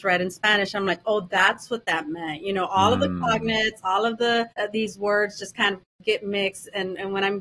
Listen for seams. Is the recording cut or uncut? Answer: cut